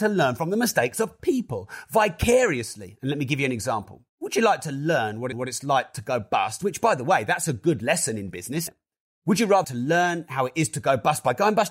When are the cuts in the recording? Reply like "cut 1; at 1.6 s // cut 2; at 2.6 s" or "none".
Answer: cut 1; at 1.2 s // cut 2; at 4.1 s // cut 3; at 5.3 s // cut 4; at 8.7 s // cut 5; at 9.6 s